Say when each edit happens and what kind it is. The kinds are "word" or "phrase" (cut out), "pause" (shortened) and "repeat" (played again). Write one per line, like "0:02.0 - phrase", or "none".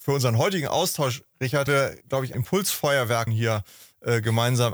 0:01.7 - word
0:02.0 - pause
0:02.3 - word
0:03.3 - word